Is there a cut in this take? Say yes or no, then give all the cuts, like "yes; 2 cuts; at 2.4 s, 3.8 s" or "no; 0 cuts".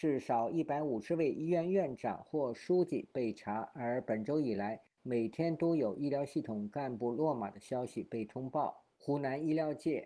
yes; 1 cut; at 8.9 s